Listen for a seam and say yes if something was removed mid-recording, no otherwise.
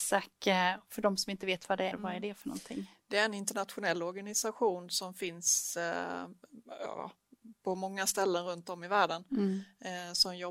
yes